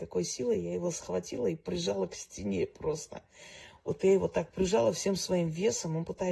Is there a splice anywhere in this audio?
no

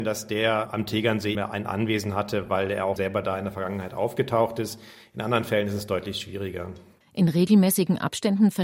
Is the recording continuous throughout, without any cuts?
no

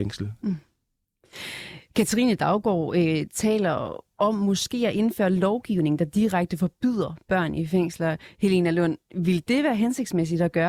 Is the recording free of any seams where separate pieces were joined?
yes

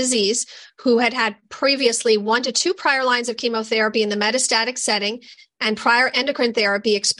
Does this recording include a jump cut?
no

